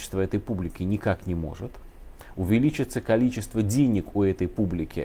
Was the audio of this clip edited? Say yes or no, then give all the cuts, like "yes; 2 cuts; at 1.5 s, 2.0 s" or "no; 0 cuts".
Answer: no; 0 cuts